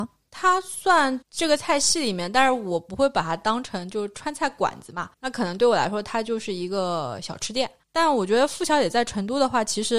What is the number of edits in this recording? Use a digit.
2